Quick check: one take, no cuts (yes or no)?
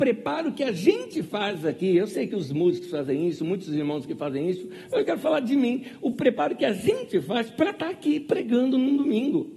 yes